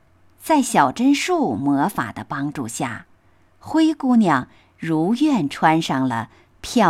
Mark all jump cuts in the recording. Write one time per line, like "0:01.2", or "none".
none